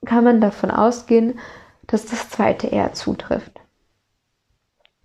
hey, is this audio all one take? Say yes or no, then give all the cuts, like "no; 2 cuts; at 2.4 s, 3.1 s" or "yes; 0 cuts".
yes; 0 cuts